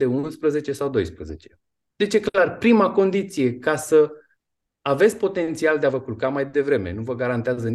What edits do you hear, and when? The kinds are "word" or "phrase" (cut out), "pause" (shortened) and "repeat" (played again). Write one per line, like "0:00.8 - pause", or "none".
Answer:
none

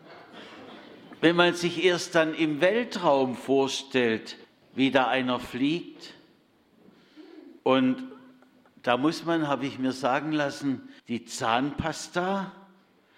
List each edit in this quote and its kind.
0:04.4 - pause
0:07.6 - pause
0:11.0 - pause

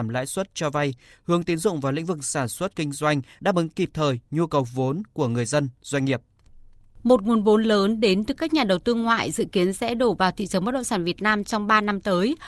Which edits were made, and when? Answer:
none

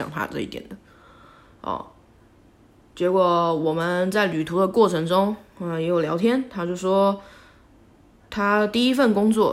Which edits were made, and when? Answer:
none

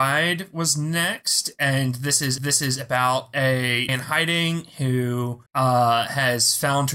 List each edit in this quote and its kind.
0:02.4 - repeat
0:03.9 - word
0:05.5 - pause

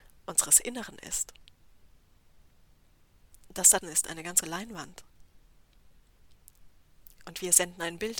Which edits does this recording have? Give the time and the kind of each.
0:03.8 - word
0:04.4 - word

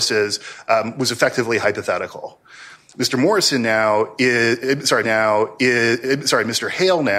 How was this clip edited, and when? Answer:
0:05.0 - repeat

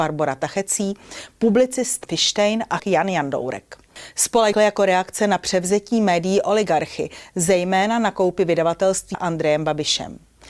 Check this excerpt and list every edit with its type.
0:02.0 - word
0:02.8 - word
0:04.5 - word
0:09.1 - word

